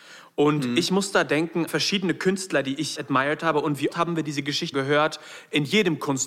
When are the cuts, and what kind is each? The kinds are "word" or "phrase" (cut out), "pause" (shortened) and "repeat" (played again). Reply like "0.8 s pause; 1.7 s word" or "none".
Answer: 1.7 s word; 3.0 s word; 3.9 s word; 4.7 s word